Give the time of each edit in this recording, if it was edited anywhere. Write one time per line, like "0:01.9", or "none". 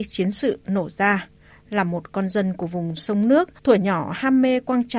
0:01.5
0:03.6